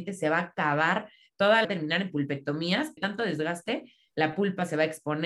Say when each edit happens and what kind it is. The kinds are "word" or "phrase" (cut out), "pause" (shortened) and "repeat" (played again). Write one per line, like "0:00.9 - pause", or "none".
0:01.6 - phrase
0:03.0 - word